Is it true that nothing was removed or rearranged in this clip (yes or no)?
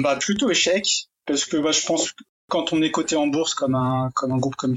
yes